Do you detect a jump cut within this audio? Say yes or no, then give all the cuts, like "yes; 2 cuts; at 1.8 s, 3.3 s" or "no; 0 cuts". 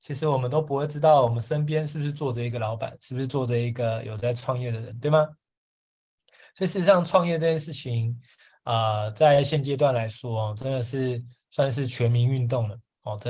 no; 0 cuts